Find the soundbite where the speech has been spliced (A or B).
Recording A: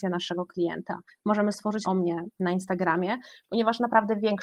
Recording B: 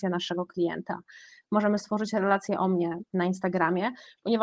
A